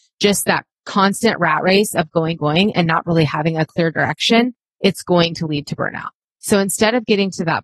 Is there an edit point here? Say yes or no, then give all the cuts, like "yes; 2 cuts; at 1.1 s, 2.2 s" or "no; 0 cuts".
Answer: yes; 1 cut; at 2.4 s